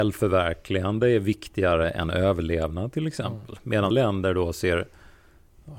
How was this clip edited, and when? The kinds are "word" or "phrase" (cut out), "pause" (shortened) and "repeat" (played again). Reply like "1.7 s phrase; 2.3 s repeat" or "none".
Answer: 3.9 s word